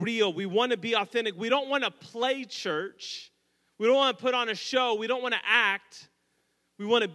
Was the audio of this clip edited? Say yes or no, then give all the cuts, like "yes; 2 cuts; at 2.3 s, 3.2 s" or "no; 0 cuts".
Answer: no; 0 cuts